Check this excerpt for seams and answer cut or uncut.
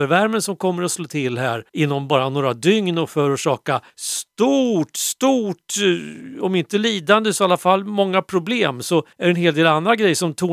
cut